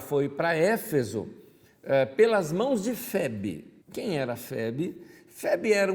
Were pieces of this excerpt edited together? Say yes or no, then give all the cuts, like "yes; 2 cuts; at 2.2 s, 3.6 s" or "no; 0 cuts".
yes; 1 cut; at 3.8 s